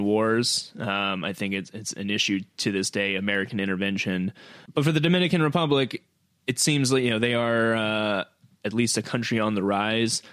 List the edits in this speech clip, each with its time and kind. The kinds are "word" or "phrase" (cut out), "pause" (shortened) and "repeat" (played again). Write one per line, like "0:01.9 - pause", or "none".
none